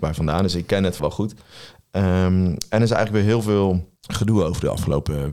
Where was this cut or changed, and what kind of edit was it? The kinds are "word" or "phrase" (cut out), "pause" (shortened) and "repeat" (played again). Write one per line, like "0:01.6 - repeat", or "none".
0:01.0 - word
0:04.0 - pause

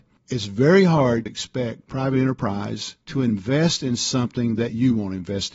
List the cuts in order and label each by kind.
0:01.3 - word
0:03.0 - pause

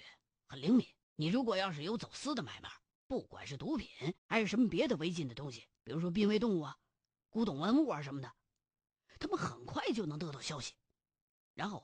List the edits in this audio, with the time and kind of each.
0:01.0 - pause
0:02.9 - pause
0:04.2 - pause
0:05.8 - pause

